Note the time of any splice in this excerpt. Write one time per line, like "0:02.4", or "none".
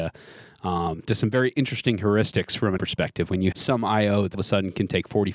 0:01.1
0:02.8
0:03.5
0:04.3